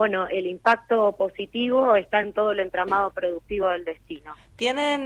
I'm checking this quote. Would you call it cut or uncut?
uncut